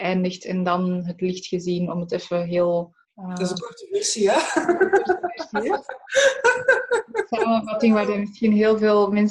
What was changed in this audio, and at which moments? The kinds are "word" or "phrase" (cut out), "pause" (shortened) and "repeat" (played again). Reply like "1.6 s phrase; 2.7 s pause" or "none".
3.0 s pause